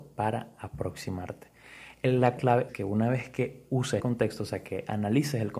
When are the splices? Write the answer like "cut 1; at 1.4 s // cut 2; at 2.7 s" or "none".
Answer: cut 1; at 2.4 s // cut 2; at 2.7 s // cut 3; at 4.0 s